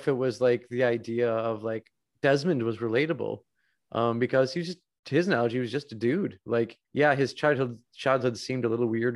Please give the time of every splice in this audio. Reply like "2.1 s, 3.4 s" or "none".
6.8 s